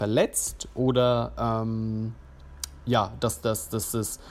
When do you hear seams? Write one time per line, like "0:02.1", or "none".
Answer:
none